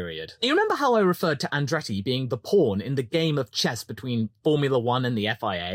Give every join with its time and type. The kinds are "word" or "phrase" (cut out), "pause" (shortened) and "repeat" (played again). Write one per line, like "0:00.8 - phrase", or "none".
none